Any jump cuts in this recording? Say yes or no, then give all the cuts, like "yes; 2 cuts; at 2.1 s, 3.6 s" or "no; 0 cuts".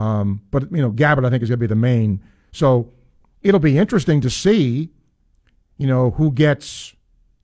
no; 0 cuts